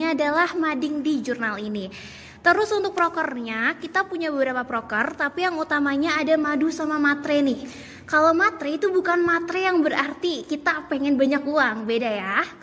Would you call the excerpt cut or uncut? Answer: uncut